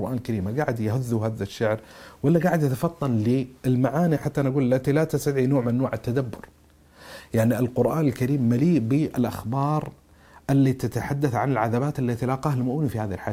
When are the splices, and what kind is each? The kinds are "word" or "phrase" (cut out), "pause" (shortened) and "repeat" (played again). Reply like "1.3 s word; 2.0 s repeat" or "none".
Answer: none

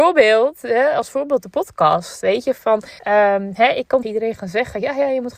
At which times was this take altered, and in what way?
3.0 s pause; 4.0 s word

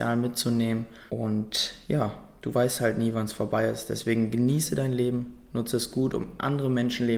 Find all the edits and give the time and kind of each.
1.1 s pause

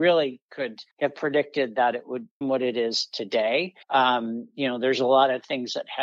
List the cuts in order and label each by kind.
0.9 s pause; 2.4 s word; 3.8 s pause

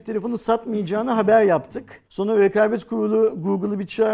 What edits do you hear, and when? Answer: 2.0 s pause

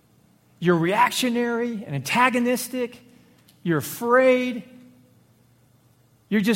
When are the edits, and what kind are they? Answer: none

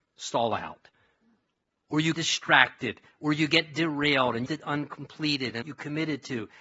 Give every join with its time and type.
2.1 s word; 4.5 s phrase; 5.6 s phrase

